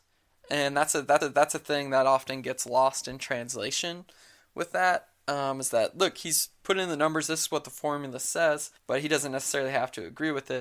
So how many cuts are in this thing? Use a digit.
2